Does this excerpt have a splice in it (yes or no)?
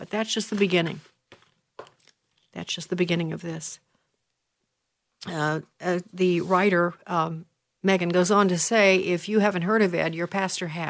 no